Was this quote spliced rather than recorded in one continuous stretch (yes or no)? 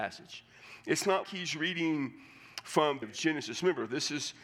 yes